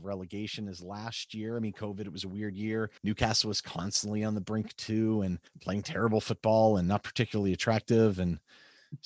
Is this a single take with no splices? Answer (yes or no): no